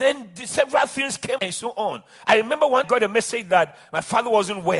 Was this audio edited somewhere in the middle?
yes; 2 cuts; at 1.4 s, 2.8 s

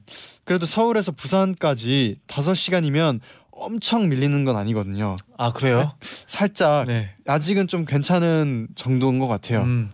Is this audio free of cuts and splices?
yes; 0 cuts

